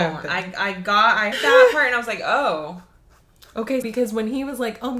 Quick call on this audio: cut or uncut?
cut